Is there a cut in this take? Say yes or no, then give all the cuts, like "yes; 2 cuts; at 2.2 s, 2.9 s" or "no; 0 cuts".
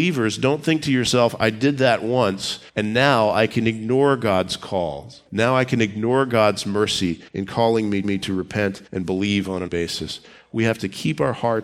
yes; 6 cuts; at 2.7 s, 5.3 s, 7.3 s, 8.0 s, 8.9 s, 9.7 s